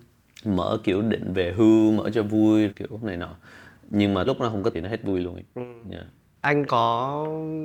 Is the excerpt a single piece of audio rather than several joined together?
no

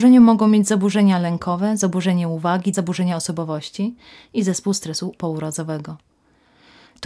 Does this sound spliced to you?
yes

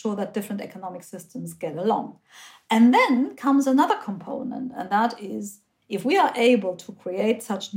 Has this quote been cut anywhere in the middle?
no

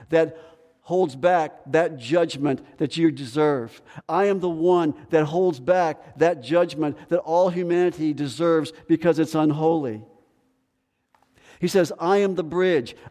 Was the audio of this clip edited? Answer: no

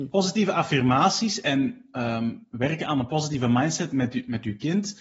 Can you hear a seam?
no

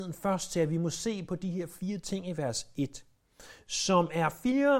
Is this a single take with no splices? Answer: yes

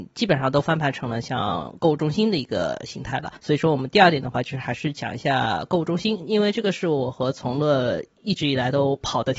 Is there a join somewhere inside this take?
yes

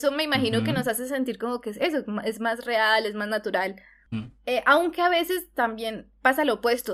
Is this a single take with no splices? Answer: yes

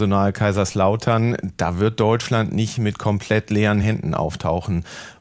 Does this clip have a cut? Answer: no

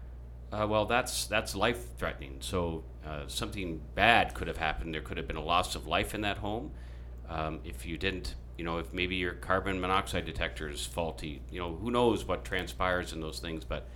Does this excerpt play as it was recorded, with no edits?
yes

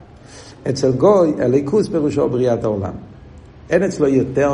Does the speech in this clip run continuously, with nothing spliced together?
yes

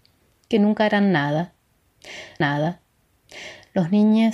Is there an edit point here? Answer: yes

